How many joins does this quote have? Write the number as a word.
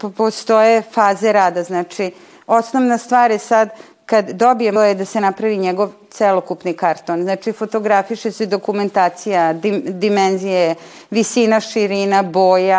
one